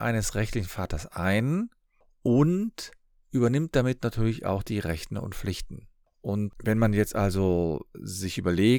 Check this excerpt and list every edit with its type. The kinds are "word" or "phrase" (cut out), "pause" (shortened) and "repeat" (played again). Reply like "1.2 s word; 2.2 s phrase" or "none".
none